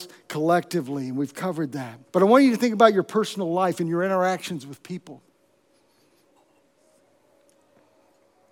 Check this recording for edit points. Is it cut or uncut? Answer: cut